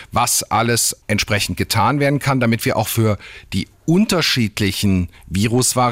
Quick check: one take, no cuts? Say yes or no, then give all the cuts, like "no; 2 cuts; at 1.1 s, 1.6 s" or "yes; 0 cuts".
no; 1 cut; at 1.0 s